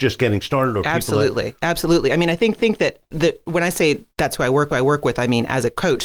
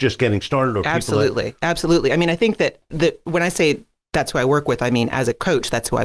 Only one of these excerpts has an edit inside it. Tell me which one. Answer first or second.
first